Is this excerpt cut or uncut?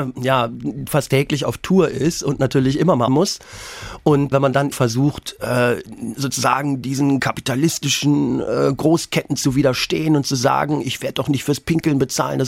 cut